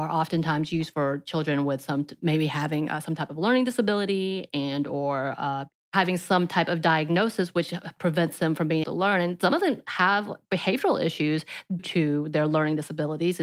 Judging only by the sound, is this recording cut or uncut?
cut